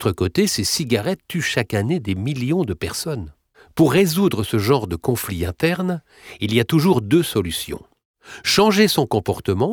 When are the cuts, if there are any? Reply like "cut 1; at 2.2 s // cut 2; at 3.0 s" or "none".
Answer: cut 1; at 3.5 s